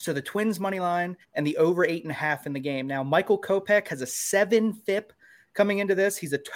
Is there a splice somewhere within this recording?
yes; 1 cut; at 1.2 s

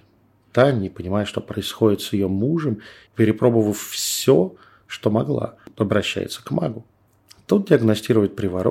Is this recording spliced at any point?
no; 0 cuts

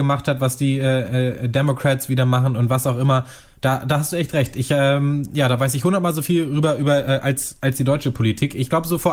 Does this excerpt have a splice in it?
no; 0 cuts

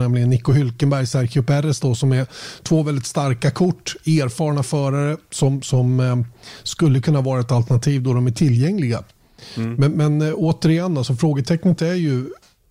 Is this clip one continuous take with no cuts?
yes; 0 cuts

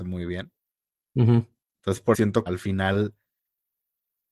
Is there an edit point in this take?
yes; 2 cuts; at 2.1 s, 2.5 s

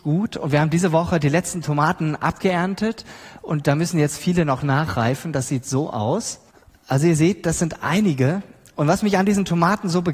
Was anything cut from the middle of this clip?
yes; 1 cut; at 6.5 s

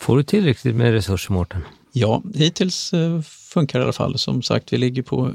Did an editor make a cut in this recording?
no; 0 cuts

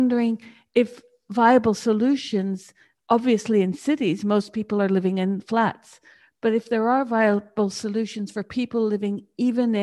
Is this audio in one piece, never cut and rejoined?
yes; 0 cuts

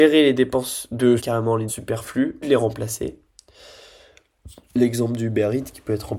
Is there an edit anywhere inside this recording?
yes; 3 cuts; at 1.2 s, 1.7 s, 2.4 s

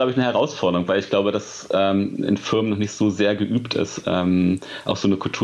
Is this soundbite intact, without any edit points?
yes; 0 cuts

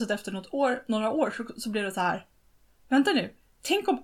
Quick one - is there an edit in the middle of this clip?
no; 0 cuts

